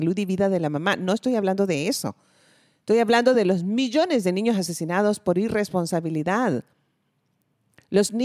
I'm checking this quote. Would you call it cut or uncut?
uncut